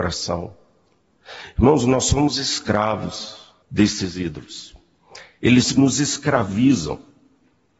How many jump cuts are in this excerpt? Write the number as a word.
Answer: one